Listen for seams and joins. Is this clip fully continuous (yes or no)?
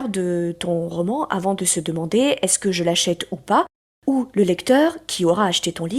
yes